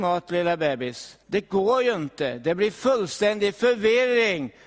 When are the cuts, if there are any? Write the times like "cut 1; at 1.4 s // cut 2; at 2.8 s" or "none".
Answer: cut 1; at 1.2 s